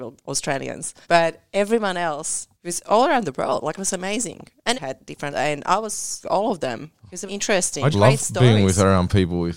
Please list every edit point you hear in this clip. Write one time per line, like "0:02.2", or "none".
0:01.0
0:02.5
0:04.7
0:05.3
0:06.2
0:07.3
0:07.9